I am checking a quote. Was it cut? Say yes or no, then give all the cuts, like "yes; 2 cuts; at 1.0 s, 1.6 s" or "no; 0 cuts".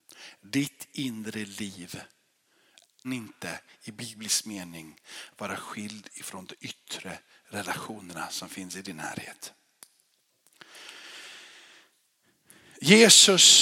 yes; 1 cut; at 3.0 s